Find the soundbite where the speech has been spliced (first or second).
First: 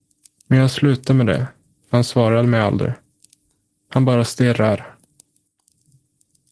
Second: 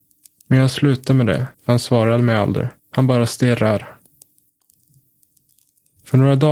second